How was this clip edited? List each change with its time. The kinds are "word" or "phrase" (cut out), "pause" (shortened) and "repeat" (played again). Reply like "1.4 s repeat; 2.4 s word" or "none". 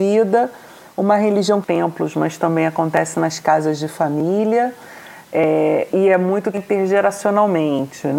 1.6 s phrase; 5.9 s word; 6.5 s word